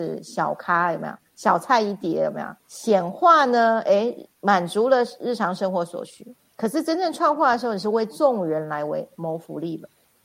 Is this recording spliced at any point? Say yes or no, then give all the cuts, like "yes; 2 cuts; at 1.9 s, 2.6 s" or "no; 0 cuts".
yes; 2 cuts; at 2.6 s, 6.4 s